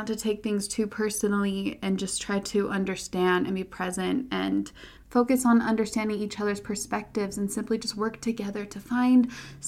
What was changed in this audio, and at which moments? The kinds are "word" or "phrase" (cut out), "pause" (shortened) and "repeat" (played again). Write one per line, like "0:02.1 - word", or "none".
none